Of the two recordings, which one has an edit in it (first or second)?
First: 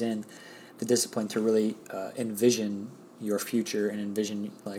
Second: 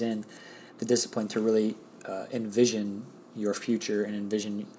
first